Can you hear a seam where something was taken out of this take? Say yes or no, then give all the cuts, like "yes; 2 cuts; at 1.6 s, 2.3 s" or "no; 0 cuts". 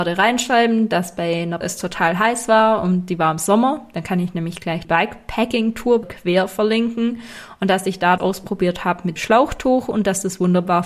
yes; 5 cuts; at 1.6 s, 4.8 s, 6.0 s, 8.2 s, 9.2 s